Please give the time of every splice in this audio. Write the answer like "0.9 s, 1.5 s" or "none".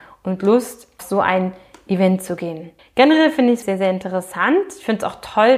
1.0 s, 2.8 s, 3.6 s